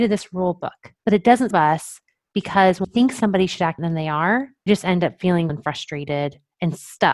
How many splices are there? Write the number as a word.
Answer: six